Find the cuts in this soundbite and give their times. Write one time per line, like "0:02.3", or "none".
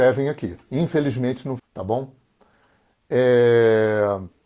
0:01.6